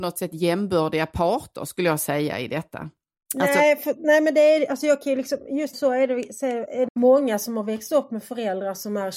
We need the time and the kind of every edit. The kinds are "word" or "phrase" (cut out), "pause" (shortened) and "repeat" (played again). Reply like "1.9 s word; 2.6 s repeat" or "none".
5.7 s phrase; 6.9 s phrase